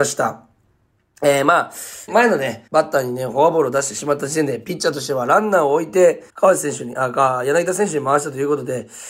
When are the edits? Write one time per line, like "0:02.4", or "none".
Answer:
0:02.1
0:02.7
0:06.3